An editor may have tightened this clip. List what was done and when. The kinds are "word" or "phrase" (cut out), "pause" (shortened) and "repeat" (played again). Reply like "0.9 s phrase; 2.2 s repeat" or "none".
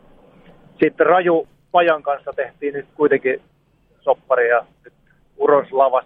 none